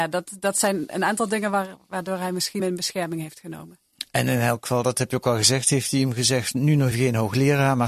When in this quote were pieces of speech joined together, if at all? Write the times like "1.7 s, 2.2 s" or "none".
2.6 s, 6.9 s

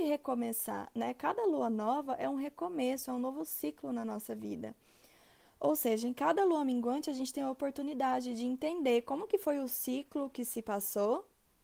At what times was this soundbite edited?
none

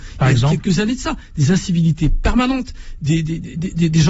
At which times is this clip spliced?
none

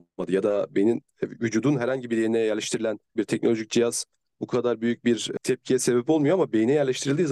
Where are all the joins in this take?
3.2 s

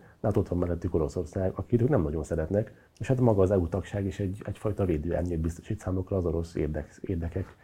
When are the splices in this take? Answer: 2.9 s

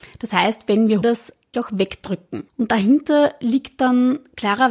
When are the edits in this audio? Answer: 1.0 s, 1.5 s, 2.5 s

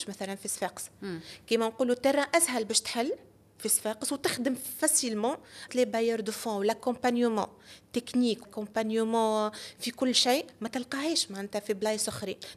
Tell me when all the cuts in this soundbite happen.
5.7 s, 8.4 s

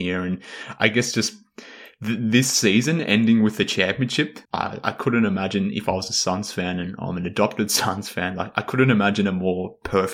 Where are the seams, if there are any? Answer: 4.4 s

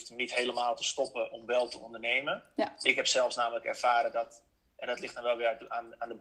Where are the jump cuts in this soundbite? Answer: none

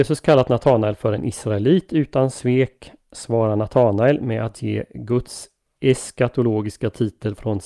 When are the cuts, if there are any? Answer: none

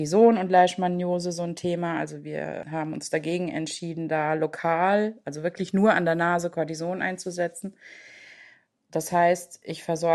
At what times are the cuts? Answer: none

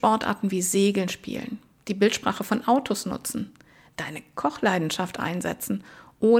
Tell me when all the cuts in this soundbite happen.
none

